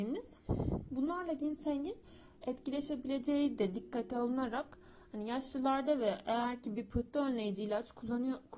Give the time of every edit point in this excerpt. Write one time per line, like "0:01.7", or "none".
none